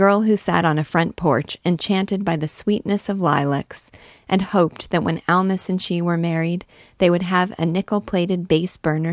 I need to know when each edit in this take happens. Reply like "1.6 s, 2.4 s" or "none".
none